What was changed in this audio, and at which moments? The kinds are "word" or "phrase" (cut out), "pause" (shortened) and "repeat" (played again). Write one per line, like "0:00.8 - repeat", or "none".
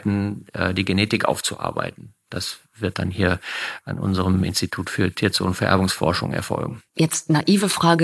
0:06.9 - pause